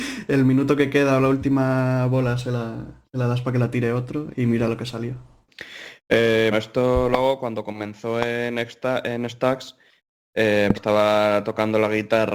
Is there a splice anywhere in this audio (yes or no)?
yes